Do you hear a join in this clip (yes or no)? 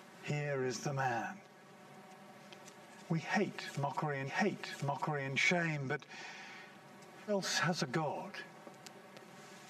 yes